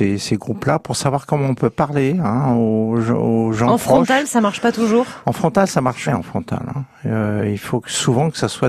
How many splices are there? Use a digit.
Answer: 1